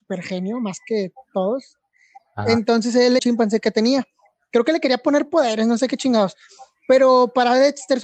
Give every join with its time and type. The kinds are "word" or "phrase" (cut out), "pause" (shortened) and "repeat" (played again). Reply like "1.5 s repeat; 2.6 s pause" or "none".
3.2 s phrase